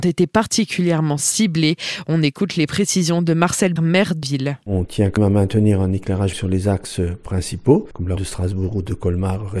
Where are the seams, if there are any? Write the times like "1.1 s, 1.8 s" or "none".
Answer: 3.8 s, 4.2 s, 5.2 s, 6.3 s, 8.2 s

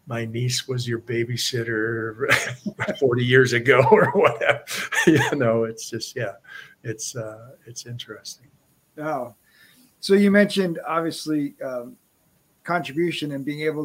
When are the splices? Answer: none

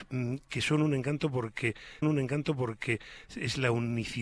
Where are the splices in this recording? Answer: 2.0 s

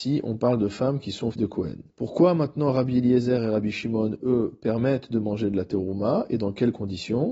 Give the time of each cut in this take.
1.3 s, 1.9 s

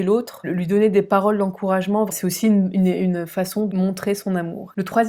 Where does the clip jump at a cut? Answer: none

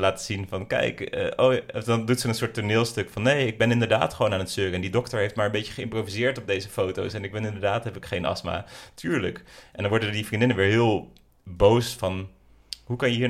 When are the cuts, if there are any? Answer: none

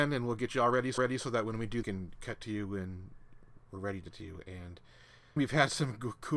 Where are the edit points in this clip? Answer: 1.0 s, 1.8 s, 4.1 s, 5.4 s

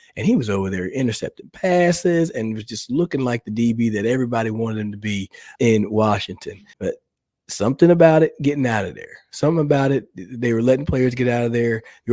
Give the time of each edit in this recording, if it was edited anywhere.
5.6 s, 6.7 s

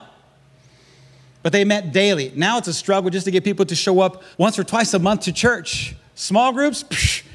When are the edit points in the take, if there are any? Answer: 4.3 s

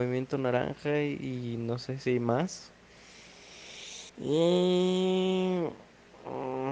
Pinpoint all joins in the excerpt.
4.1 s

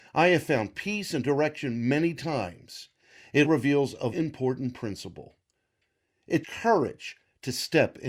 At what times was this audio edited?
3.4 s, 4.1 s, 6.4 s

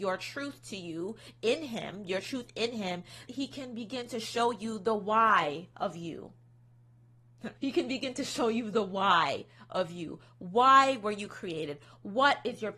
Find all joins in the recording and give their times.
3.3 s, 7.6 s

